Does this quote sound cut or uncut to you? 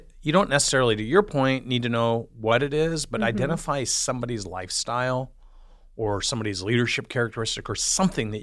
uncut